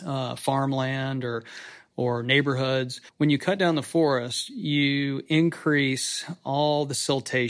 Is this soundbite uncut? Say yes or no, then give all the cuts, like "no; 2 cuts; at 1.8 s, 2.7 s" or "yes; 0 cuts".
no; 1 cut; at 3.1 s